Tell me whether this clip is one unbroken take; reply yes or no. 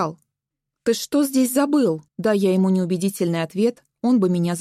no